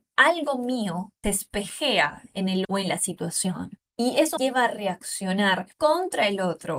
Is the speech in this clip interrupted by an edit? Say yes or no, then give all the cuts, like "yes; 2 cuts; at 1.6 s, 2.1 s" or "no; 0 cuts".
yes; 5 cuts; at 1.2 s, 2.6 s, 3.9 s, 4.4 s, 5.7 s